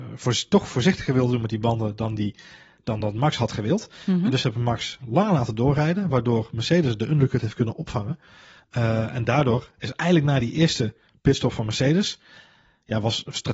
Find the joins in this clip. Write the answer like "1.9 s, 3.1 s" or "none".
none